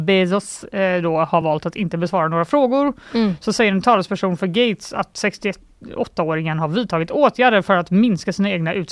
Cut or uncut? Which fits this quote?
uncut